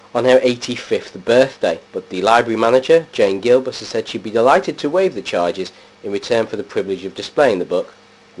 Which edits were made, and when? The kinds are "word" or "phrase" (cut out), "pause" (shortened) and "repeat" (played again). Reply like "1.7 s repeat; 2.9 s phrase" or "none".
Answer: 1.9 s pause